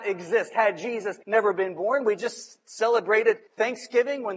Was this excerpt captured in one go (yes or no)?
no